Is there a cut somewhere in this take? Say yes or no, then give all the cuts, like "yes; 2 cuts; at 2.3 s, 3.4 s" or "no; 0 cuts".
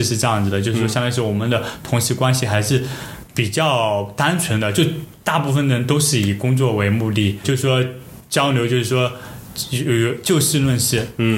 yes; 1 cut; at 7.4 s